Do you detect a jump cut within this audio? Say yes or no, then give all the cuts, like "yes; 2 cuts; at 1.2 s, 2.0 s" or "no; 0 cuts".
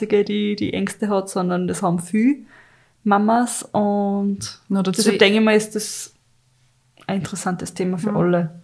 no; 0 cuts